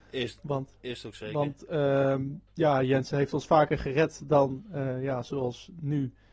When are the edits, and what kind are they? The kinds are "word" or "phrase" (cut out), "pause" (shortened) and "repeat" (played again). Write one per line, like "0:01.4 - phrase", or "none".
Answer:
0:02.5 - pause